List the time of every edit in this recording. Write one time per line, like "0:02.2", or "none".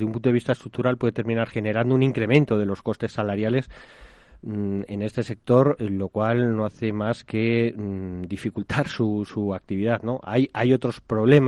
none

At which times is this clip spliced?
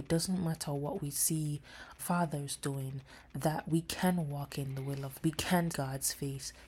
0:02.0
0:05.2
0:05.7

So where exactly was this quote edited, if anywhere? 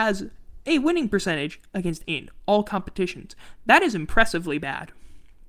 0:02.0

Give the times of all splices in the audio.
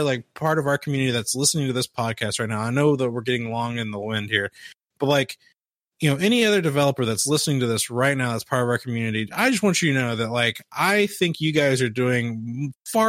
none

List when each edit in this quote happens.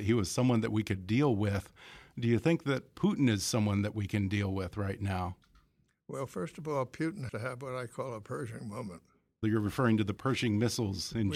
0:07.3

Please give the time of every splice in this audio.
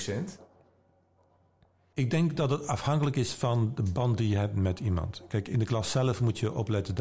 none

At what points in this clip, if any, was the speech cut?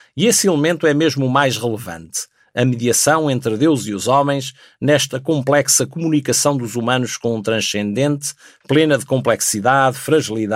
none

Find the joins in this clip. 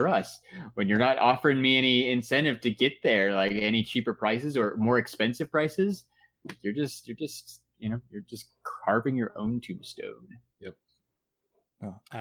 none

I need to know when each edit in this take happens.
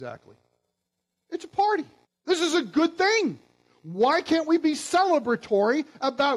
0:02.0

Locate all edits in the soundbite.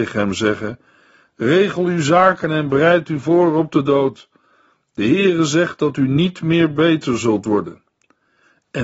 none

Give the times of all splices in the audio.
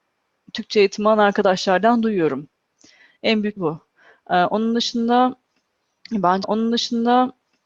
0:03.6
0:06.4

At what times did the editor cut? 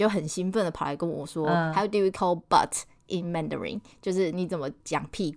none

